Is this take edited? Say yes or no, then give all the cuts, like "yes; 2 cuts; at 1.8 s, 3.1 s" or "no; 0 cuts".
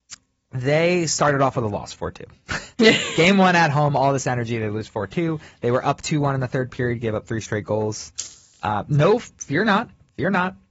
no; 0 cuts